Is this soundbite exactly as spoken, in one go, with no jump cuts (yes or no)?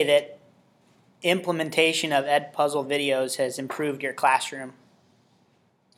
yes